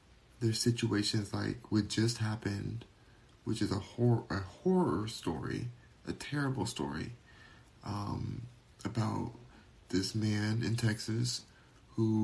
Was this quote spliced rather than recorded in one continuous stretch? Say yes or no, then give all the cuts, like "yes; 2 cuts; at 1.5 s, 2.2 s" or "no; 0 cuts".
no; 0 cuts